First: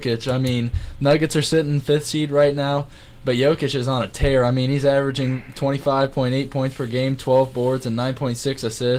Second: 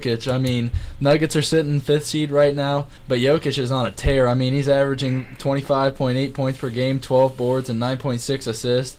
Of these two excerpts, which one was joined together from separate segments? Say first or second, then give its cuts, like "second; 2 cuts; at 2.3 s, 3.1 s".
second; 1 cut; at 3.0 s